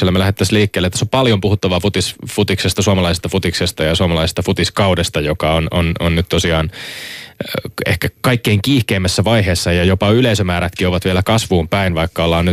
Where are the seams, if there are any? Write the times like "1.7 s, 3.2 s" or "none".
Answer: none